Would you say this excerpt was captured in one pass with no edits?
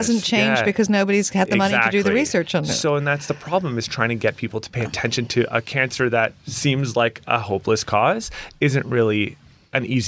yes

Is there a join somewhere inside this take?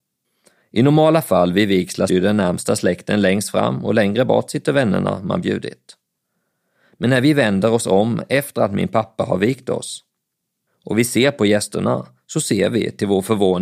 yes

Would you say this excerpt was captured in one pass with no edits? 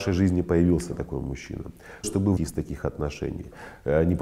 no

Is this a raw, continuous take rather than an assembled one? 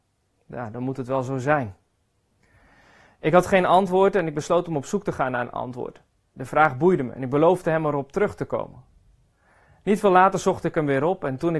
yes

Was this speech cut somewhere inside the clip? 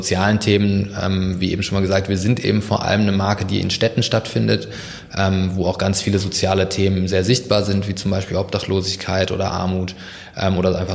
no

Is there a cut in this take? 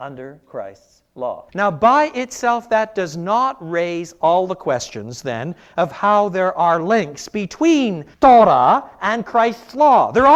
yes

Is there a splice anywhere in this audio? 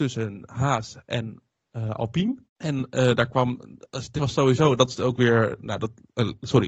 yes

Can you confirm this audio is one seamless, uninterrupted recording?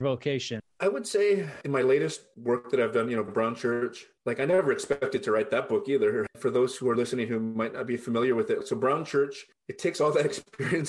yes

